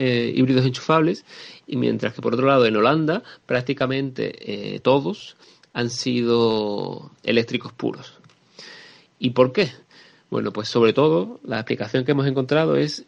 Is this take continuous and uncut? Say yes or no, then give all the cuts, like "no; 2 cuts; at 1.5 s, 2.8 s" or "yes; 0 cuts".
yes; 0 cuts